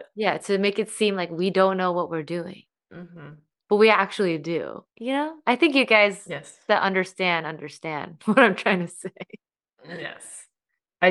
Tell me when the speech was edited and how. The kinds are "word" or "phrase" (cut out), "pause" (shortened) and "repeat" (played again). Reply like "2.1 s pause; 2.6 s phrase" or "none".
4.9 s pause; 9.4 s pause